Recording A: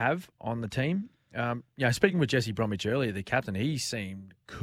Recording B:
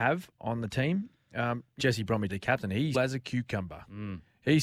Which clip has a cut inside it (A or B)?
B